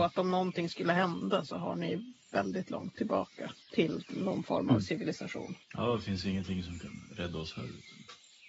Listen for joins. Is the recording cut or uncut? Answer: cut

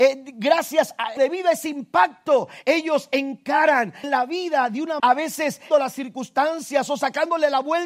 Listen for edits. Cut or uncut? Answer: cut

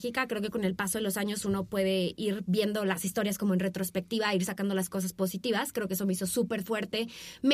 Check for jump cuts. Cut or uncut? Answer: uncut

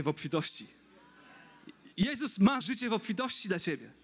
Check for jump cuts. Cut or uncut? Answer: cut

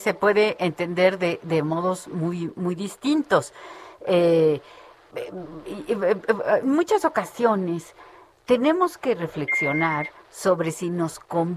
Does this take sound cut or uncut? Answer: uncut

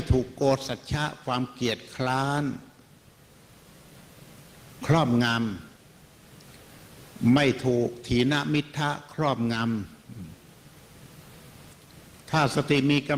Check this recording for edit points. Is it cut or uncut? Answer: uncut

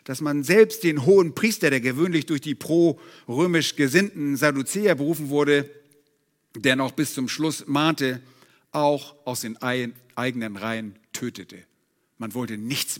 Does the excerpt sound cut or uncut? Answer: uncut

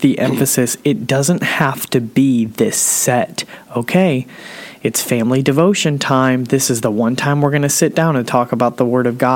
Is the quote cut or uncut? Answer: uncut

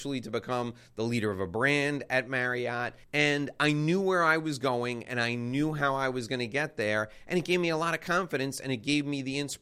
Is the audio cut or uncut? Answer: cut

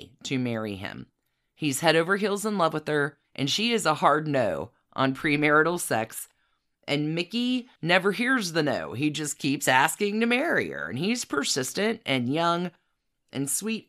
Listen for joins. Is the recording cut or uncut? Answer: cut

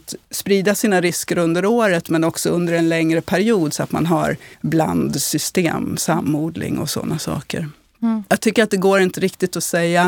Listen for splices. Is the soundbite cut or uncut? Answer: cut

